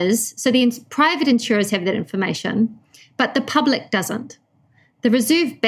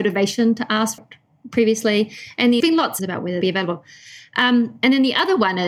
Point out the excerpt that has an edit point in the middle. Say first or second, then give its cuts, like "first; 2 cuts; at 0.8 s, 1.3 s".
second; 4 cuts; at 1.0 s, 2.6 s, 3.0 s, 3.4 s